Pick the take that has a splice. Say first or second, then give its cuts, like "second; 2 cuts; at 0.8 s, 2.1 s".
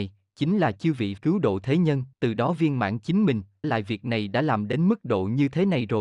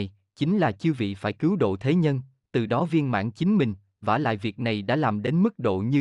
first; 3 cuts; at 1.2 s, 2.1 s, 3.6 s